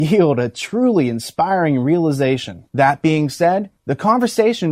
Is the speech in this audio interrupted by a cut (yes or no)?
yes